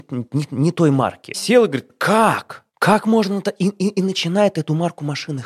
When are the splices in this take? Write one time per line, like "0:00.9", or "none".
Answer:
0:02.7